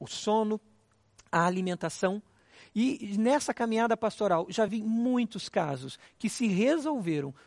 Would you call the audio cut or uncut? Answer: uncut